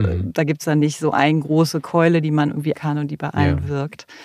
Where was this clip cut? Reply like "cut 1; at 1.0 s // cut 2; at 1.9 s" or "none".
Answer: cut 1; at 2.7 s